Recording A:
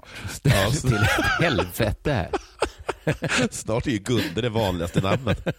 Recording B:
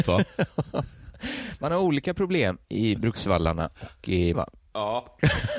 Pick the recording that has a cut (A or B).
B